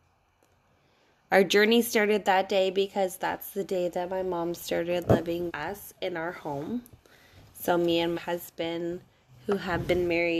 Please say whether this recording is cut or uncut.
cut